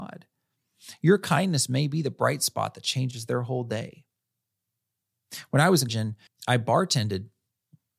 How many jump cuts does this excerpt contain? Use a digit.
2